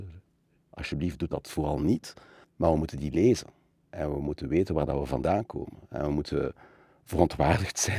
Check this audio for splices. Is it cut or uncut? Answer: uncut